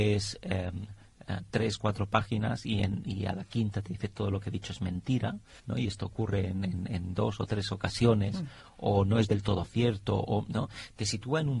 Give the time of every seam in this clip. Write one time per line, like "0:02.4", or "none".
0:05.6